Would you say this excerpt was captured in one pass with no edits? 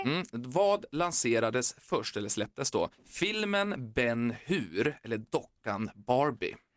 no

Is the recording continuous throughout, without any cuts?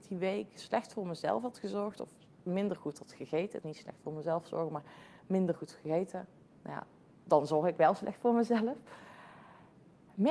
no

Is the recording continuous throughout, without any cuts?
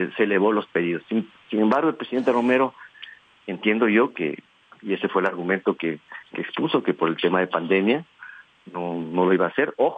yes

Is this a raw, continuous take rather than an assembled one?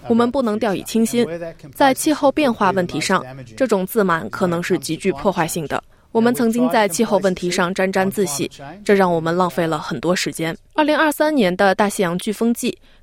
no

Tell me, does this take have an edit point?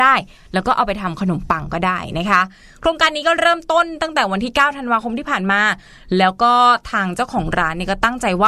no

